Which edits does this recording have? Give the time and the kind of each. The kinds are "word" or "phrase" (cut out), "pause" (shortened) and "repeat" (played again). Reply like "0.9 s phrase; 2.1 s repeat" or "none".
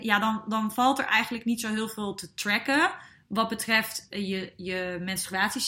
none